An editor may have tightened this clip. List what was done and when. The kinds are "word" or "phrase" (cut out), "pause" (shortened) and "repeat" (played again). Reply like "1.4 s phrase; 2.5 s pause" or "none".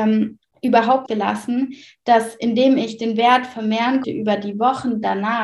1.1 s word; 4.0 s word